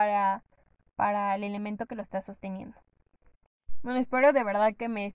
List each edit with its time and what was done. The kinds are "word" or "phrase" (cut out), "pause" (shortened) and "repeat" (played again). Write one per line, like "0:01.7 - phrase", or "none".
none